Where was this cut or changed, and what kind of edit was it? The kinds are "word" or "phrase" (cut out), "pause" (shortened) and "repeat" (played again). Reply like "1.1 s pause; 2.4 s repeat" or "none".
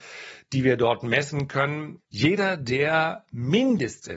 2.0 s pause